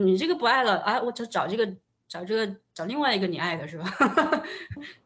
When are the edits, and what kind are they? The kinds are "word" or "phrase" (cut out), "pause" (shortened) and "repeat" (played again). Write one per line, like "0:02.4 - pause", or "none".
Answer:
none